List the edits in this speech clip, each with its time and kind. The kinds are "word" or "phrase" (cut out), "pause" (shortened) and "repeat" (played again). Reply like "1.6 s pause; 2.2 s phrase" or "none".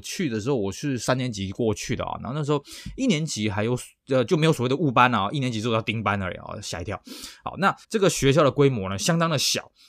7.8 s pause